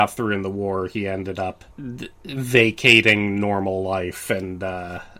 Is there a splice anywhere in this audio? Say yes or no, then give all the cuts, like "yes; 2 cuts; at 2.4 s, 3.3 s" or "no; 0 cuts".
yes; 1 cut; at 1.7 s